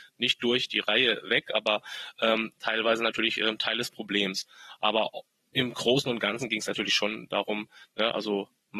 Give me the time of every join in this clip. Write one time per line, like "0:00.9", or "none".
none